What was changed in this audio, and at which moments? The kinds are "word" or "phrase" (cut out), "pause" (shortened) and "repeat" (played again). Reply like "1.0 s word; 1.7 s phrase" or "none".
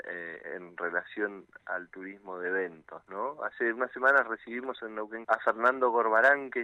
5.2 s word

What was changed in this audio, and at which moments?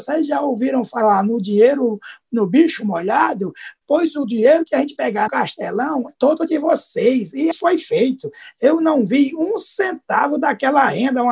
3.8 s pause; 5.3 s phrase; 6.1 s word; 7.5 s word

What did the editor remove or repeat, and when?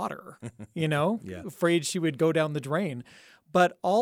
none

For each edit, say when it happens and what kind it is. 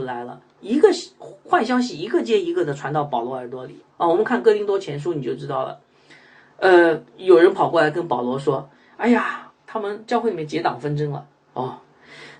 3.9 s pause; 7.1 s pause

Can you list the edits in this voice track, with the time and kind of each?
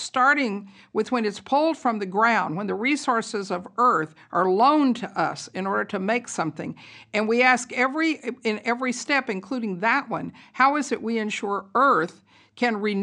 none

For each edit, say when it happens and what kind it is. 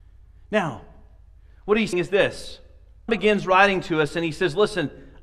1.9 s word; 3.1 s word

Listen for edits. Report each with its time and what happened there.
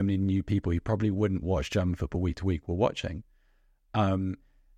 none

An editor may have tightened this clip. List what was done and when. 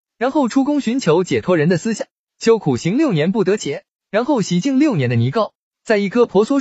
none

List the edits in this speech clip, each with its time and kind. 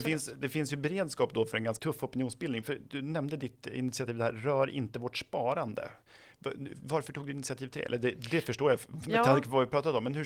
1.8 s word

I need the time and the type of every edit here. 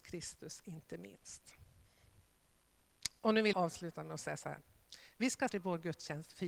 3.5 s word; 5.5 s word

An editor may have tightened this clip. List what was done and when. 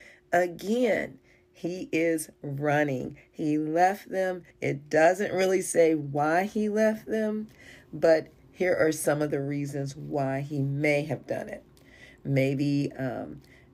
4.5 s pause

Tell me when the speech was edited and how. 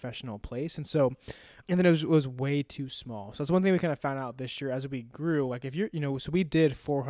1.6 s word

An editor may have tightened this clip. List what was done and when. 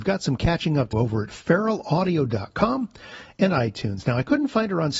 0.9 s word

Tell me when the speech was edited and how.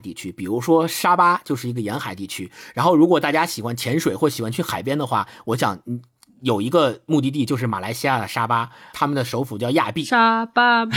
8.9 s word

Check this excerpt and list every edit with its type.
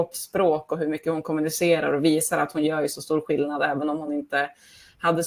none

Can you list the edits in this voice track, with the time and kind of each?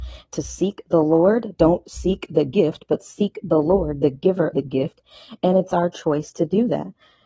4.5 s word

